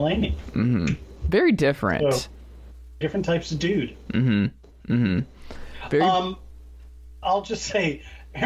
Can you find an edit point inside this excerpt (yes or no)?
yes